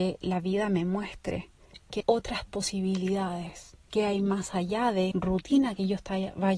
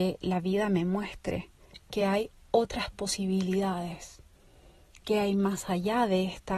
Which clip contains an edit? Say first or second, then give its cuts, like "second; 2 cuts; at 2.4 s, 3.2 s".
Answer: first; 3 cuts; at 2.0 s, 3.8 s, 5.1 s